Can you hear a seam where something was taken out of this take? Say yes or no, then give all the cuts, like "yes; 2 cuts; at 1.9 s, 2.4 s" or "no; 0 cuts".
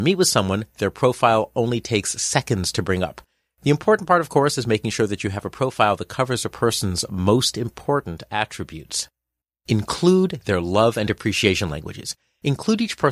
no; 0 cuts